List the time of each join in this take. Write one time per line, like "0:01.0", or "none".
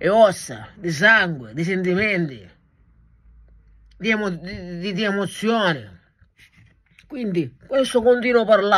none